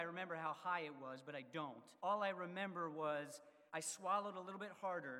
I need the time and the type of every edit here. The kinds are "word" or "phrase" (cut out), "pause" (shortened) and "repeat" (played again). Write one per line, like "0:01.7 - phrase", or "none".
0:02.0 - pause
0:03.7 - pause